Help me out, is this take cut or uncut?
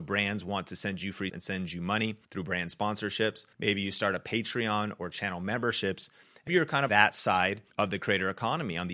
cut